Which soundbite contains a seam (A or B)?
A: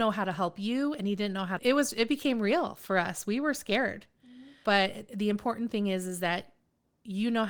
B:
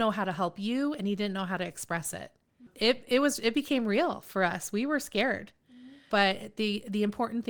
A